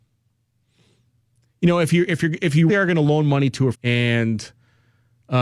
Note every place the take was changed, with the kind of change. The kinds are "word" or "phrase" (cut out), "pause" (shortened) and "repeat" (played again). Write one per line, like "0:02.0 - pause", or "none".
0:02.7 - word
0:03.7 - word